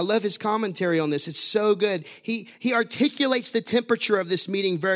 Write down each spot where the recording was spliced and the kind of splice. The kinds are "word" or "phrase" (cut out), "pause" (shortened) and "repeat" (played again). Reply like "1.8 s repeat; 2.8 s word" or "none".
none